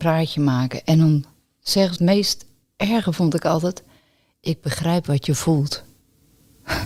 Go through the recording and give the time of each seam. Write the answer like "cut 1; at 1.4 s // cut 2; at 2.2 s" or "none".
cut 1; at 2.0 s